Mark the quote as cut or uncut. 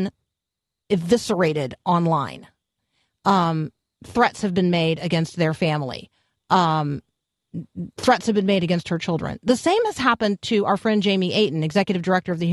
uncut